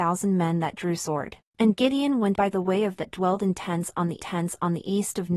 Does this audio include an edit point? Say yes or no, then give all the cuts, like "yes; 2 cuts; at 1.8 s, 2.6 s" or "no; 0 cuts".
yes; 4 cuts; at 1.5 s, 2.3 s, 3.0 s, 4.2 s